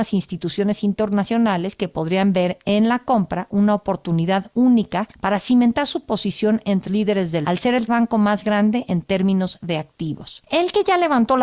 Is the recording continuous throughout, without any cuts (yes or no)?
no